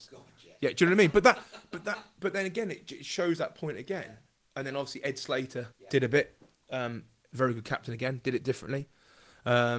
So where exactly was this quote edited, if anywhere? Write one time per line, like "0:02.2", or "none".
0:05.7